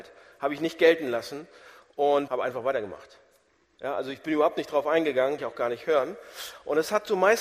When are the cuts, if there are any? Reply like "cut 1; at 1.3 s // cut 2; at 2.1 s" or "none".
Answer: cut 1; at 2.3 s // cut 2; at 5.4 s